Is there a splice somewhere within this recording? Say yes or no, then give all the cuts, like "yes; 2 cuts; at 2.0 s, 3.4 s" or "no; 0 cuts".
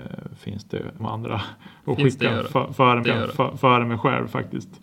yes; 2 cuts; at 1.0 s, 3.0 s